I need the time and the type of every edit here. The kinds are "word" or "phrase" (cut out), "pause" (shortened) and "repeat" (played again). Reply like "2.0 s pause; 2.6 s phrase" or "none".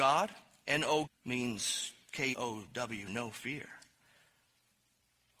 1.1 s word; 2.3 s word; 3.1 s word

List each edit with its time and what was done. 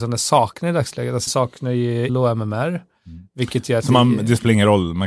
1.3 s word; 2.1 s word

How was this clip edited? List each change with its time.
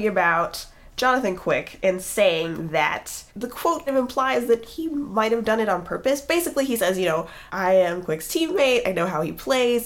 3.3 s pause; 3.9 s word; 7.5 s pause

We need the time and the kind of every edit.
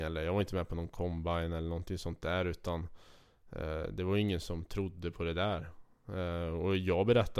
none

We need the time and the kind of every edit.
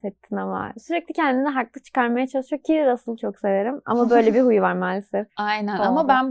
none

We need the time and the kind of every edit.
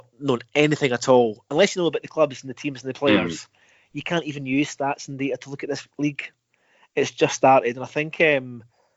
none

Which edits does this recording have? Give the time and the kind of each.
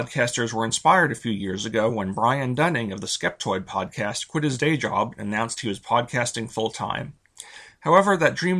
none

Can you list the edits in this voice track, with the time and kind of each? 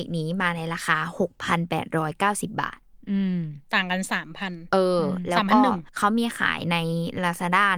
5.9 s pause

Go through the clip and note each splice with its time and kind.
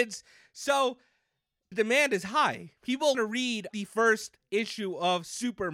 1.7 s word; 3.1 s word; 3.7 s word

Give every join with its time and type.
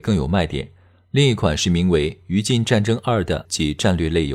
3.4 s word

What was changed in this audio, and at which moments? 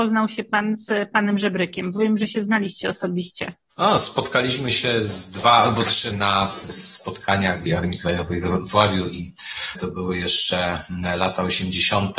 6.1 s word; 7.7 s phrase

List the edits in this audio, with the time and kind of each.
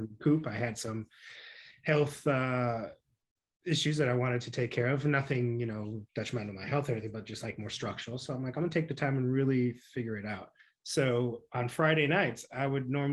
3.1 s pause; 6.1 s pause; 10.6 s pause

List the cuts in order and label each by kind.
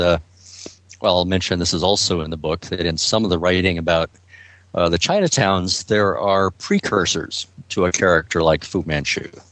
none

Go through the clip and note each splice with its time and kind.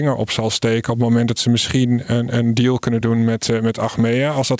none

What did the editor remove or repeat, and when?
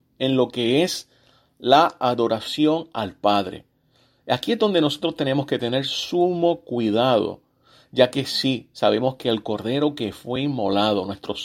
none

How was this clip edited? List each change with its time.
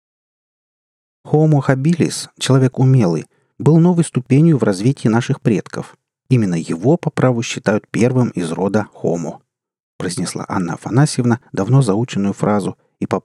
none

